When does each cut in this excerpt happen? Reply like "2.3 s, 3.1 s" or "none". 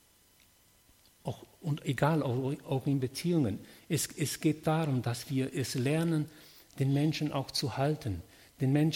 none